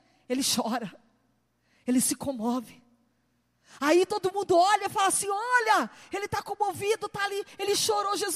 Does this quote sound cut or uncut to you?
uncut